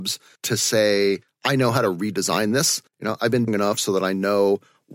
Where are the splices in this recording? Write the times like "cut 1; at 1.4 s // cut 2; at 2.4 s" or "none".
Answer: cut 1; at 2.9 s // cut 2; at 3.5 s

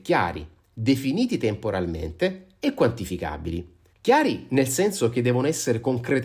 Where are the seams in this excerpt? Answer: cut 1; at 3.9 s

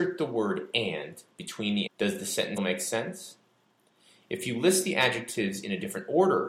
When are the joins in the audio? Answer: cut 1; at 1.9 s // cut 2; at 2.6 s

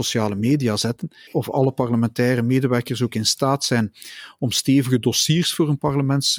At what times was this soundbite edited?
cut 1; at 1.3 s

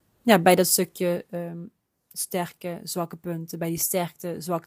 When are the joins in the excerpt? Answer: none

